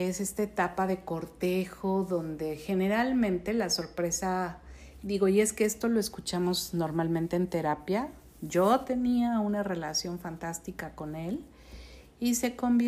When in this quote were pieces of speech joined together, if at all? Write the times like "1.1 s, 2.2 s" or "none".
none